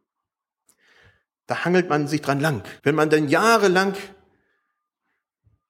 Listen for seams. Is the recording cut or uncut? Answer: cut